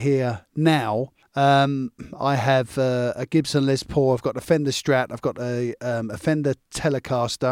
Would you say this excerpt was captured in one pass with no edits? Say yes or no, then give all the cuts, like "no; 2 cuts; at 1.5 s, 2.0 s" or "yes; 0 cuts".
no; 1 cut; at 1.2 s